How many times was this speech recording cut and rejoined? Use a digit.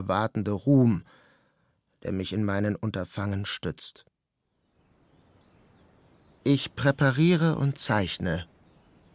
0